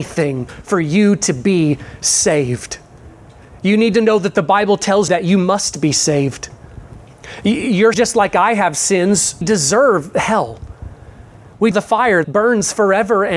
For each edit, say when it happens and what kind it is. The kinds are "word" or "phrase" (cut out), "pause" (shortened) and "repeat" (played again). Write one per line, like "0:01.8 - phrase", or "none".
0:05.1 - word
0:07.9 - word
0:09.4 - word
0:11.7 - word
0:12.2 - word